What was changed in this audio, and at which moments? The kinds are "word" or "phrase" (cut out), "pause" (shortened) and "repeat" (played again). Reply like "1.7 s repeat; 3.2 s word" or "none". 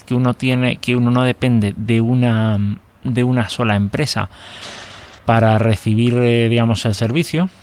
5.2 s pause